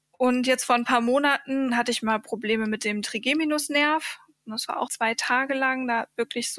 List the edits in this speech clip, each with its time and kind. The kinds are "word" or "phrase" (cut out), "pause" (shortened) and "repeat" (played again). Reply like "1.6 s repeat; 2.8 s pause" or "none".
4.9 s word